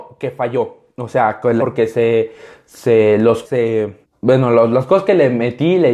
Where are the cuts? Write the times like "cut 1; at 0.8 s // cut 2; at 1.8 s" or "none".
cut 1; at 1.6 s // cut 2; at 3.4 s // cut 3; at 4.0 s